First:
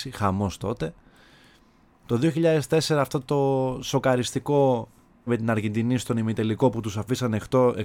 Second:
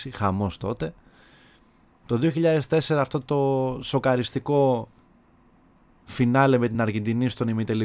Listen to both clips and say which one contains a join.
first; 1 cut; at 5.3 s

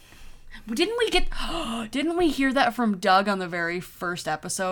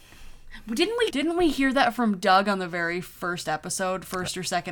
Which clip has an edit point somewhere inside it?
second; 1 cut; at 1.1 s

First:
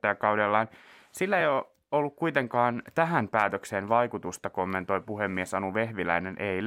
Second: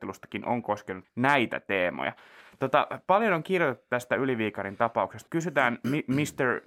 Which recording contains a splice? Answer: second; 2 cuts; at 1.0 s, 5.3 s

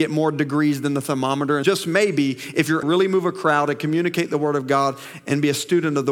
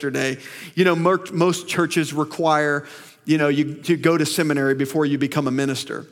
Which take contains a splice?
first; 2 cuts; at 1.6 s, 2.8 s

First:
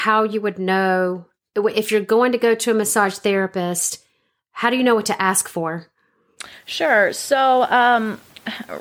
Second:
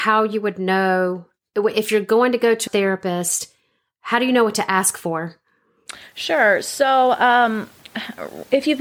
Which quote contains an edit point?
second; 1 cut; at 2.7 s

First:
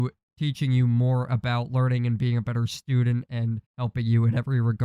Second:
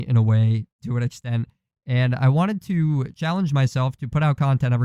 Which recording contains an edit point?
first; 1 cut; at 3.7 s

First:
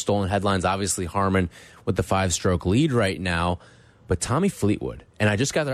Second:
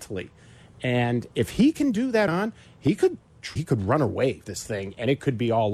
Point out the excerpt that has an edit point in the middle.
second; 4 cuts; at 1.3 s, 2.3 s, 3.6 s, 4.4 s

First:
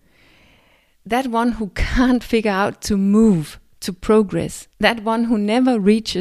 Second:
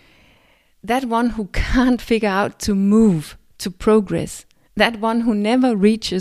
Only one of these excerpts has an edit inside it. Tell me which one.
first; 1 cut; at 4.7 s

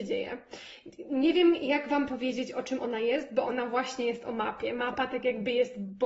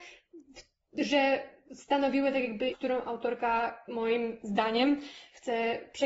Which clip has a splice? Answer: second; 1 cut; at 2.7 s

